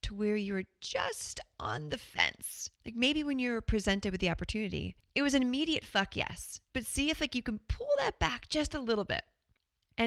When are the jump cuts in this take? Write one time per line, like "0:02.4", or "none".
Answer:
0:02.8
0:05.0
0:06.7